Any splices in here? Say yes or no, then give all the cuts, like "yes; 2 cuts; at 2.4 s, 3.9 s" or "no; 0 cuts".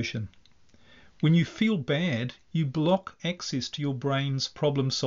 no; 0 cuts